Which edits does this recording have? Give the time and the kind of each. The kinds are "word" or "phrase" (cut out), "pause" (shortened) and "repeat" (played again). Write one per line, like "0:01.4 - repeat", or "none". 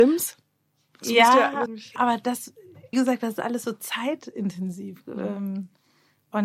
0:01.7 - word
0:02.0 - word
0:02.9 - word